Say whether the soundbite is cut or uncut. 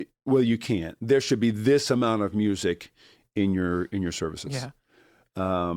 uncut